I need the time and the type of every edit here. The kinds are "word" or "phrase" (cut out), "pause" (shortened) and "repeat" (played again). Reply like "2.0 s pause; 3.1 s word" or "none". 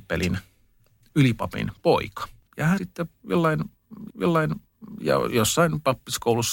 2.5 s pause; 2.8 s word; 4.1 s repeat